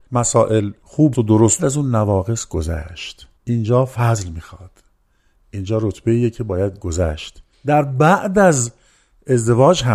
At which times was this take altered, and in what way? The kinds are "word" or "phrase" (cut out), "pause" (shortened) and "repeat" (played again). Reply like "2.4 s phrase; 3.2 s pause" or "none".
1.1 s word; 1.6 s phrase; 3.4 s pause; 7.5 s pause